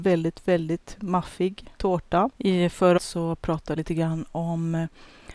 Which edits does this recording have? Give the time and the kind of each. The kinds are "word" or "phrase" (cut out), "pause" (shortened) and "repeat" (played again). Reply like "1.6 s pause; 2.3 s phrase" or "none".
1.8 s word; 3.0 s word; 3.8 s word